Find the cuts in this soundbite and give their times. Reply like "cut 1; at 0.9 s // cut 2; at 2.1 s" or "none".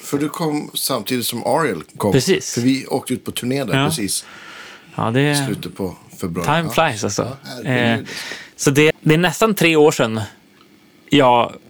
cut 1; at 8.9 s